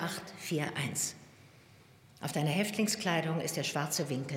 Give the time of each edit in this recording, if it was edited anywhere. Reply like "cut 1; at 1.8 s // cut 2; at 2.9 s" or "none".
none